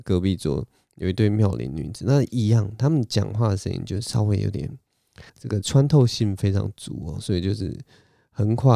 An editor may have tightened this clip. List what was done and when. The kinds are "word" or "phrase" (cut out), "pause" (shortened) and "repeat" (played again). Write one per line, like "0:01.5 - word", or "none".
0:05.3 - pause